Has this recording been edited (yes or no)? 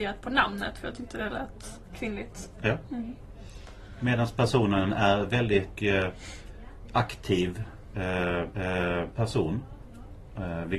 yes